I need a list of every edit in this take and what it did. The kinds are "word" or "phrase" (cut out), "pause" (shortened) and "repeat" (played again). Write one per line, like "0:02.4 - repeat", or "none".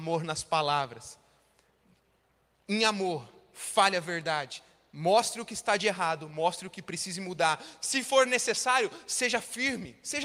none